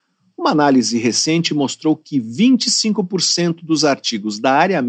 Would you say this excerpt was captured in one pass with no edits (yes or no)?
yes